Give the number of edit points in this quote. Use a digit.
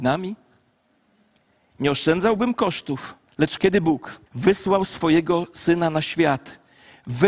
2